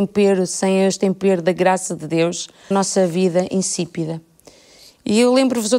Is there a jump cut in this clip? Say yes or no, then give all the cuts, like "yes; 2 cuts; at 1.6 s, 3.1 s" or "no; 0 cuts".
yes; 1 cut; at 2.7 s